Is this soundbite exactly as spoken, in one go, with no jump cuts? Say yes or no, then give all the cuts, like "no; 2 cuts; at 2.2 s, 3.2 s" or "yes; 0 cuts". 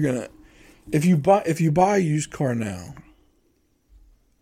yes; 0 cuts